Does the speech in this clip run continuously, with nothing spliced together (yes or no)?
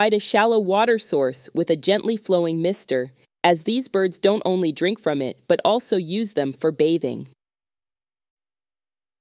yes